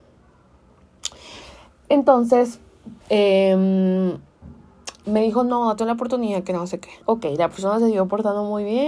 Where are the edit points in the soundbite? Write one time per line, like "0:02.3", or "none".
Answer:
0:03.0
0:07.0